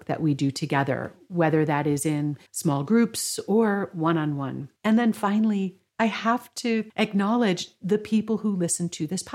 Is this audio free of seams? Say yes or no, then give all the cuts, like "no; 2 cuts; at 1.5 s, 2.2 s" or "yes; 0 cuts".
no; 3 cuts; at 2.5 s, 4.8 s, 5.9 s